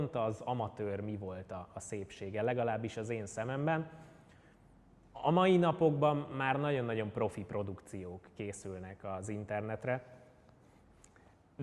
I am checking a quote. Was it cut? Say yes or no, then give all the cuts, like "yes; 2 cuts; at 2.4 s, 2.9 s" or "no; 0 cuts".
no; 0 cuts